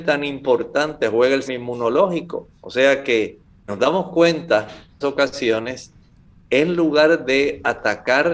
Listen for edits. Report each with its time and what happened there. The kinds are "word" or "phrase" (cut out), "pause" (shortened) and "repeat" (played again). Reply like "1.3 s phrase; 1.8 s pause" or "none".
1.5 s word; 3.7 s word; 5.0 s phrase